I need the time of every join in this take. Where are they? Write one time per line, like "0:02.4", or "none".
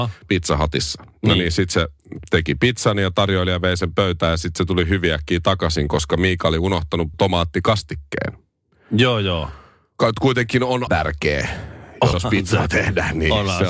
0:07.1
0:10.9
0:12.1